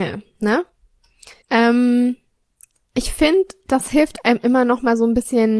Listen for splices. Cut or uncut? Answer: cut